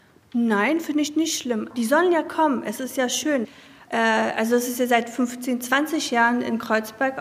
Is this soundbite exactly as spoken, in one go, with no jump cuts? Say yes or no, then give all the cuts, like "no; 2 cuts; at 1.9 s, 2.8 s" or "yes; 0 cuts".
yes; 0 cuts